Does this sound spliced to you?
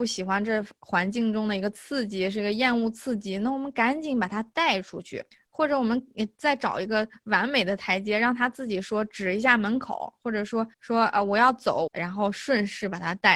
yes; 3 cuts; at 5.3 s, 10.7 s, 11.9 s

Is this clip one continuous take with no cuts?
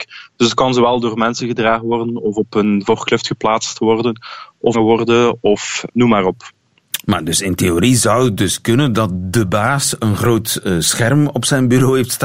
no; 2 cuts; at 4.7 s, 5.9 s

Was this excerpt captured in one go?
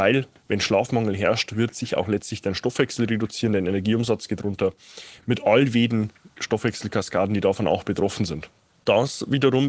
yes; 0 cuts

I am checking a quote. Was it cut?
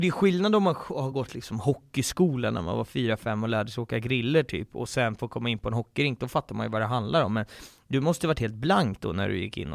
no; 0 cuts

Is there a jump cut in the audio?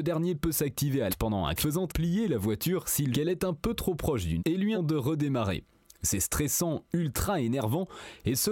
yes; 6 cuts; at 1.1 s, 1.6 s, 1.9 s, 3.1 s, 4.4 s, 4.7 s

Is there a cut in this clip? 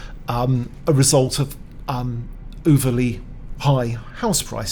no; 0 cuts

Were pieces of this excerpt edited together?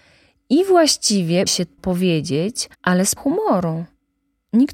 yes; 4 cuts; at 1.5 s, 1.8 s, 2.7 s, 3.2 s

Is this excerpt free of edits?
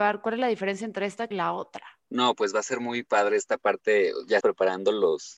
no; 4 cuts; at 1.3 s, 2.0 s, 3.0 s, 4.4 s

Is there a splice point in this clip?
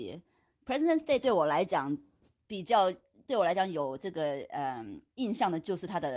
no; 0 cuts

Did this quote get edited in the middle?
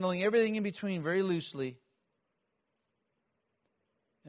no; 0 cuts

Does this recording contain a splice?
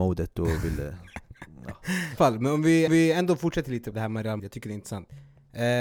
yes; 4 cuts; at 2.2 s, 2.9 s, 3.9 s, 4.4 s

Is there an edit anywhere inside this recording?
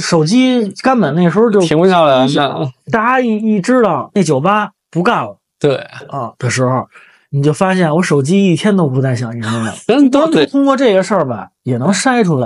no; 0 cuts

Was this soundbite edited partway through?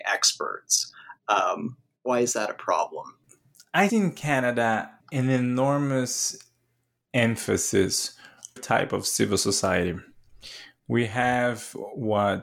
yes; 3 cuts; at 3.9 s, 5.0 s, 8.6 s

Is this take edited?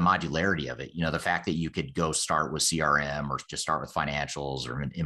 no; 0 cuts

